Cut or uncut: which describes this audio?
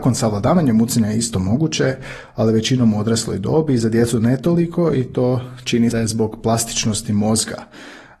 cut